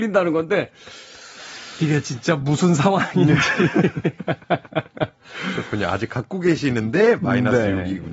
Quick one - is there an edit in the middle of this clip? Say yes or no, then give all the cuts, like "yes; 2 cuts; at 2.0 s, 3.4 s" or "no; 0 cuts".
no; 0 cuts